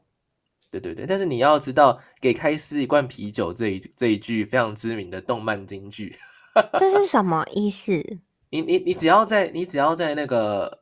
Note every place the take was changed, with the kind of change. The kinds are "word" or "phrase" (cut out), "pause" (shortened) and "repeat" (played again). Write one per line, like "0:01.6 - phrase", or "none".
none